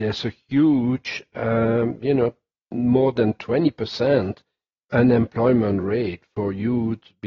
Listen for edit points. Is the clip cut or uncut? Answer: uncut